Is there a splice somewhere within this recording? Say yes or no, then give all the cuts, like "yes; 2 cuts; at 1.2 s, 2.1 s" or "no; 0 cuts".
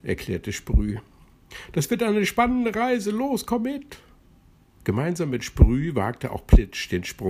no; 0 cuts